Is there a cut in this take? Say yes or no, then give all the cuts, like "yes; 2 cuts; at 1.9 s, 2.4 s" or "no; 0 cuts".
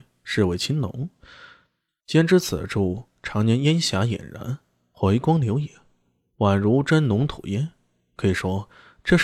no; 0 cuts